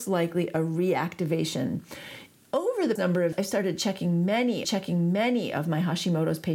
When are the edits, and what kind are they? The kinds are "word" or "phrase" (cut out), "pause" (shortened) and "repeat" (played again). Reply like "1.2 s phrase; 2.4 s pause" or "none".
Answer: 3.0 s word; 3.3 s word; 4.6 s repeat